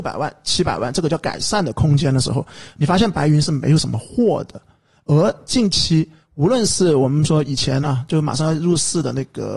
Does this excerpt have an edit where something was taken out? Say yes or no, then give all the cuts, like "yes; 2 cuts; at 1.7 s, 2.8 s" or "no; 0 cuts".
no; 0 cuts